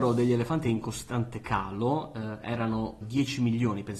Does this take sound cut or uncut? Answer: cut